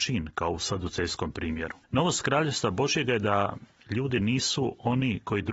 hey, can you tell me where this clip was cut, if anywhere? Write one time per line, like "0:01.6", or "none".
0:01.8